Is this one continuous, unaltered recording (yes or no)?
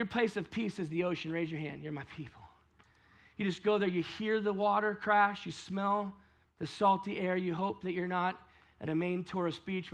no